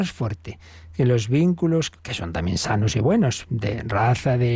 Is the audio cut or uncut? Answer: uncut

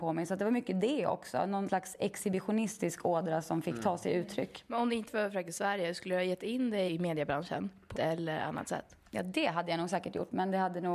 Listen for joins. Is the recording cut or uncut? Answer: cut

